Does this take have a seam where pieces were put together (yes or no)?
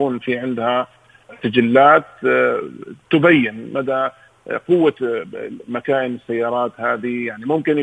no